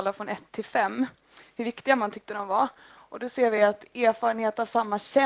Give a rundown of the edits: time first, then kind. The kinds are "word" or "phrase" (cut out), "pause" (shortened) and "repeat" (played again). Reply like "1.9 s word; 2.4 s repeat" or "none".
none